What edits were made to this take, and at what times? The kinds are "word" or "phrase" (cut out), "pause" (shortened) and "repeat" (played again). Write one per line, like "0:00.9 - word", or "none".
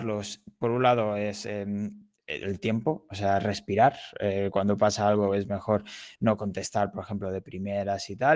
none